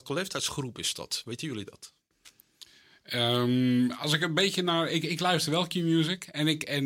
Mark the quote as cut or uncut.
uncut